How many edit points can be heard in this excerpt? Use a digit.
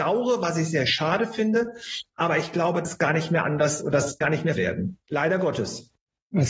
3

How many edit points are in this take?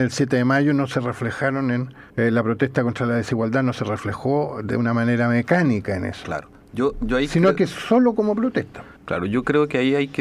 2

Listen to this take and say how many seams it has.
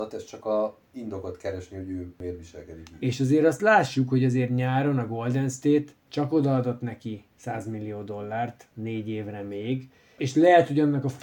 0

